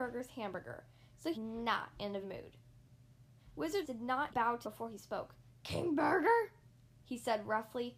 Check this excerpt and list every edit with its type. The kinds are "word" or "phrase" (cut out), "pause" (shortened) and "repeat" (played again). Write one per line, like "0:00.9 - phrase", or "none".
0:01.3 - phrase
0:02.2 - phrase
0:03.8 - word
0:04.3 - word
0:04.6 - phrase
0:05.5 - pause